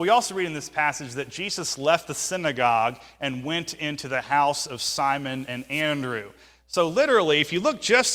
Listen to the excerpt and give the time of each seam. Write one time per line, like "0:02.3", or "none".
none